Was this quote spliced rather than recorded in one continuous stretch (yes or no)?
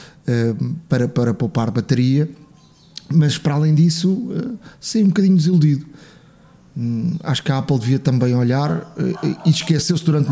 no